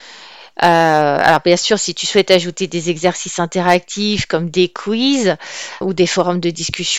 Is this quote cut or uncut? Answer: cut